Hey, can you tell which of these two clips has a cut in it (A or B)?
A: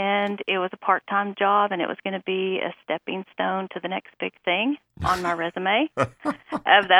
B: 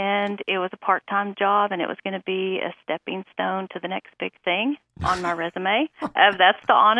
B